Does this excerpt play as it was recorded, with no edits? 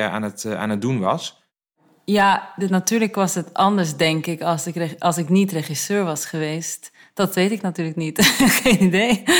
yes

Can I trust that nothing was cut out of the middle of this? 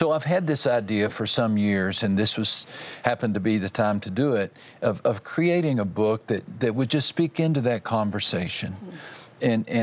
yes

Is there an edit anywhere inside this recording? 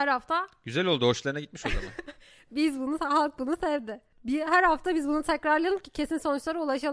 no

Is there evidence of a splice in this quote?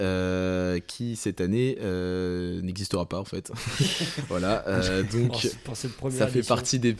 no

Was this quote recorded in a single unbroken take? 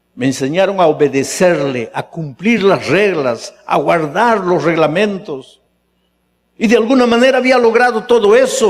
yes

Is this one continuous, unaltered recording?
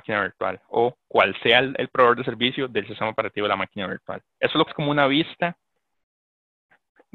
no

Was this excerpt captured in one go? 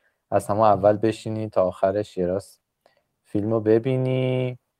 yes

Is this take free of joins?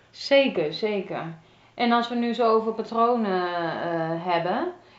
yes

